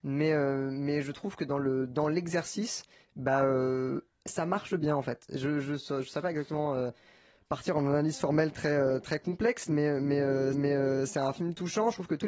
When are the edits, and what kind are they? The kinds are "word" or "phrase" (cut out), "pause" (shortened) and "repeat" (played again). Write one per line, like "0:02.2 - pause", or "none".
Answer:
0:10.5 - repeat

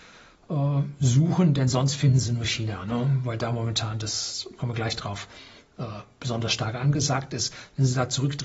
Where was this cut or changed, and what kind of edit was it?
none

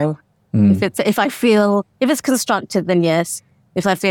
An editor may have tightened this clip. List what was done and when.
0:01.0 - word
0:01.9 - pause

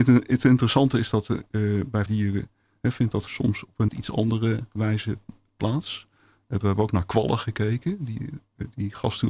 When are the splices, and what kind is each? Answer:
0:02.1 - word
0:03.3 - word
0:03.9 - word
0:06.6 - word

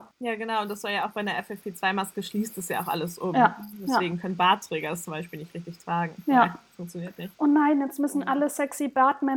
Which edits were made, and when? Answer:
none

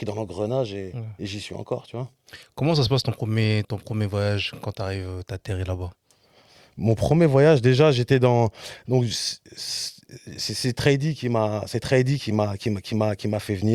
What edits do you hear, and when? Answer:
0:03.6 - word

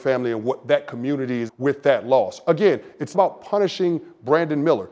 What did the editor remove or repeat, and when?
0:01.5 - word
0:03.1 - word

